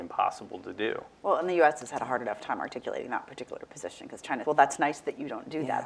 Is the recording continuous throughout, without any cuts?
no; 1 cut; at 4.4 s

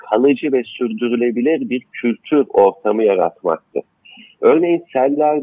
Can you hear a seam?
no; 0 cuts

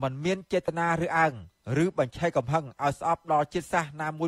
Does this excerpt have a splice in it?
no; 0 cuts

